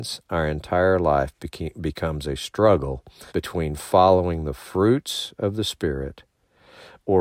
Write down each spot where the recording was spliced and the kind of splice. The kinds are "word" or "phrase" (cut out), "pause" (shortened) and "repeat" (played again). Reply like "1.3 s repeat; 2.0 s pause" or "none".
3.3 s pause